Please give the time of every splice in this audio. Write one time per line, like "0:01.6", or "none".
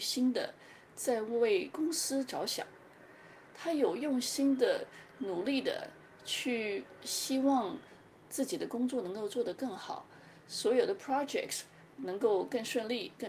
none